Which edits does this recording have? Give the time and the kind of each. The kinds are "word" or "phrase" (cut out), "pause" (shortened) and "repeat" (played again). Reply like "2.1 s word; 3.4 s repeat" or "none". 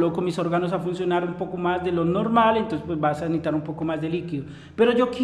none